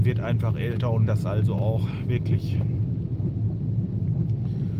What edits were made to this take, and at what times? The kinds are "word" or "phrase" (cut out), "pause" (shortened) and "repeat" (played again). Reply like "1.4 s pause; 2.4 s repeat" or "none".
1.1 s word